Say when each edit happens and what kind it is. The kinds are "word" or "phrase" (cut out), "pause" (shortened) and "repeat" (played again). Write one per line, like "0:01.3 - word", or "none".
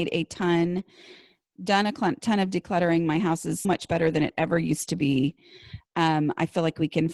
0:03.6 - word